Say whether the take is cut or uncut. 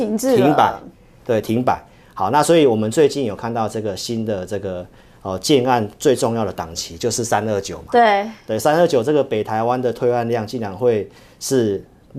uncut